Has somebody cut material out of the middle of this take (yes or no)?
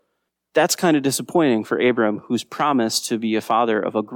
no